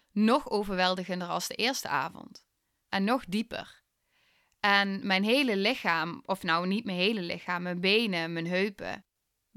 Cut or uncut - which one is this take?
uncut